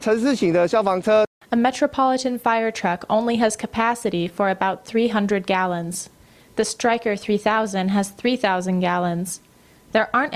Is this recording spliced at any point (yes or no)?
no